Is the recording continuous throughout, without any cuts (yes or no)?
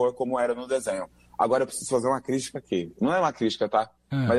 yes